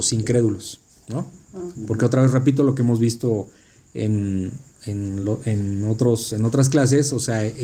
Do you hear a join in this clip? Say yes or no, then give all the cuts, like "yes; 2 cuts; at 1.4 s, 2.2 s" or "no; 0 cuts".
no; 0 cuts